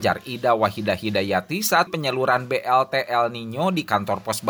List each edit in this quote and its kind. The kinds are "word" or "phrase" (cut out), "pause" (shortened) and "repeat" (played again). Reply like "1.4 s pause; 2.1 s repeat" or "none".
1.9 s word